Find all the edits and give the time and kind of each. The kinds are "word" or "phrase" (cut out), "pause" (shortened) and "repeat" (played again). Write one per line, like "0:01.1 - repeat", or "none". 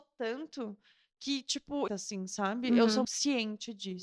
0:01.9 - phrase
0:03.0 - word